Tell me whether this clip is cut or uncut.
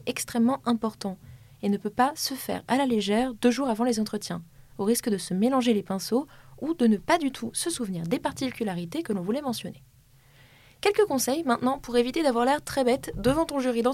uncut